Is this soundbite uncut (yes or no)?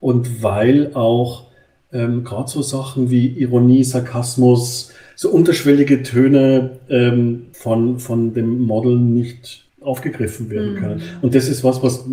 no